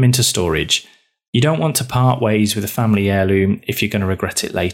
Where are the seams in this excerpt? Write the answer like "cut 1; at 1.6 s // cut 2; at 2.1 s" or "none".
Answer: none